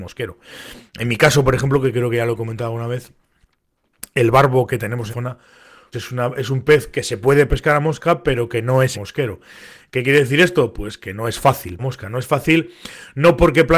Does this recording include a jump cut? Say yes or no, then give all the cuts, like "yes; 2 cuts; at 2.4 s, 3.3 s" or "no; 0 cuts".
yes; 4 cuts; at 5.1 s, 5.9 s, 8.9 s, 11.8 s